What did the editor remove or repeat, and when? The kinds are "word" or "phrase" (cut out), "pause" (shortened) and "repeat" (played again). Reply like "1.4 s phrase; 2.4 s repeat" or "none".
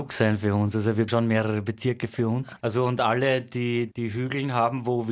1.1 s word; 3.9 s word